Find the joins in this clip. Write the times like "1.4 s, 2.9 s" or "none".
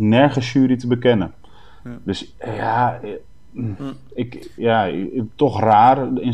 4.6 s

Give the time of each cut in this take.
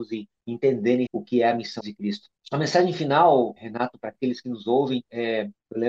1.1 s, 1.8 s, 3.6 s

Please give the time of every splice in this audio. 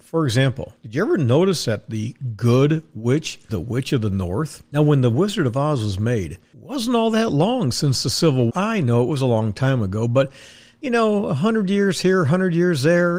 3.5 s, 8.5 s

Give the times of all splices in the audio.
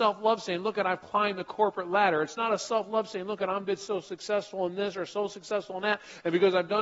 none

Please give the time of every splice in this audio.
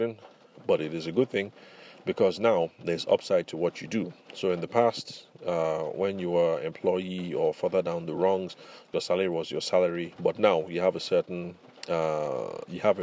none

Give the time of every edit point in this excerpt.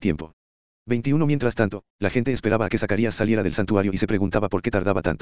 none

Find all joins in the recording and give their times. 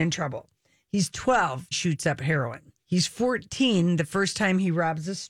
1.7 s, 2.8 s

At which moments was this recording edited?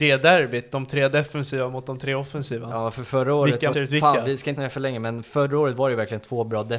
3.7 s, 4.6 s

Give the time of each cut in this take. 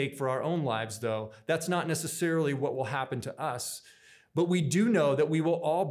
none

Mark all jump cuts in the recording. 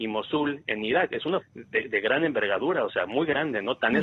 1.4 s

